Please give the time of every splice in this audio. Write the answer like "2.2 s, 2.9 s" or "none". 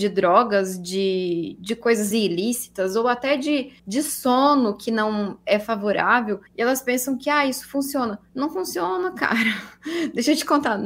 2.1 s, 3.8 s, 6.5 s, 8.3 s